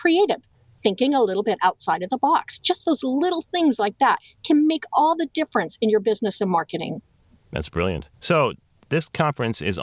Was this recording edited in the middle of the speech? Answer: yes; 1 cut; at 8.1 s

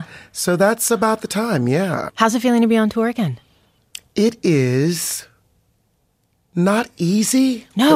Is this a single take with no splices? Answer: yes; 0 cuts

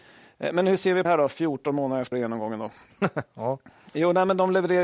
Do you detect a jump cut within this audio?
yes; 2 cuts; at 1.0 s, 2.1 s

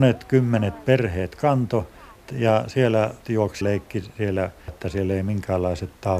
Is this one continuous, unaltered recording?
no; 3 cuts; at 3.2 s, 3.6 s, 4.7 s

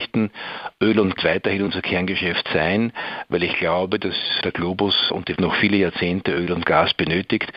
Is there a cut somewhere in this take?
yes; 2 cuts; at 1.2 s, 5.4 s

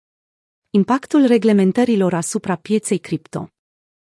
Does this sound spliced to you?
no; 0 cuts

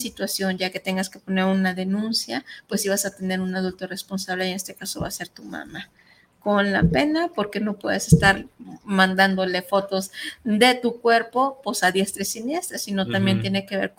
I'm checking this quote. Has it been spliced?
no; 0 cuts

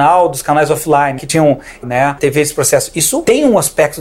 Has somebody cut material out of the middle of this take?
yes; 3 cuts; at 1.2 s, 1.8 s, 2.2 s

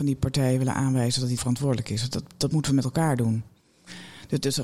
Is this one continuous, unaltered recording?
no; 1 cut; at 1.4 s

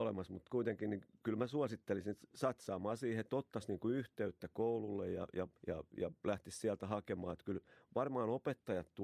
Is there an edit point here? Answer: yes; 1 cut; at 5.6 s

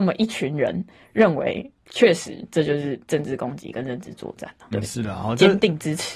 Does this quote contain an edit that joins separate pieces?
yes; 1 cut; at 4.7 s

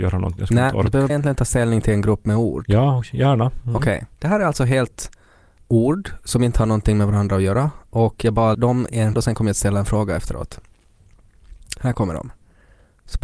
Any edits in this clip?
yes; 4 cuts; at 1.1 s, 4.1 s, 8.5 s, 9.1 s

